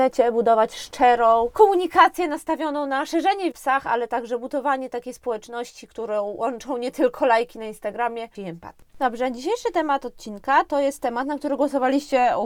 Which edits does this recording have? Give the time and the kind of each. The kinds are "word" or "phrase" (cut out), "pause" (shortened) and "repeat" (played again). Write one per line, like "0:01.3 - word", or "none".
0:03.5 - phrase
0:08.3 - phrase
0:08.9 - pause